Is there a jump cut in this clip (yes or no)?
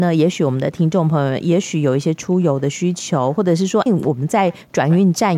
yes